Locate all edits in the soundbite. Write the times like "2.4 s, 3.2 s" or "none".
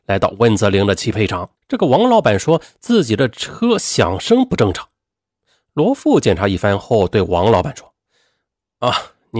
1.6 s